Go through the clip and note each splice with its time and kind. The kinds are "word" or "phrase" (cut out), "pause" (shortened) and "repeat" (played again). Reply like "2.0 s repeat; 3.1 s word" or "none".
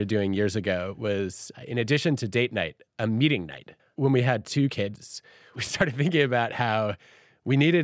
3.8 s pause